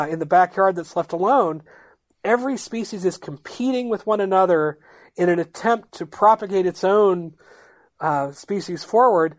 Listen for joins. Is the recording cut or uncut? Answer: uncut